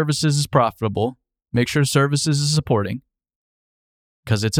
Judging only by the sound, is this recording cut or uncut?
uncut